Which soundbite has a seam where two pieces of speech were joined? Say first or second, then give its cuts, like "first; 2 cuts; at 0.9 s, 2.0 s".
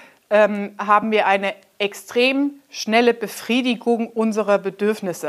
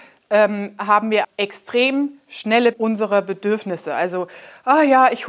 second; 2 cuts; at 1.2 s, 2.7 s